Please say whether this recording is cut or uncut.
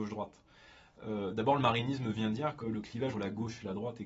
cut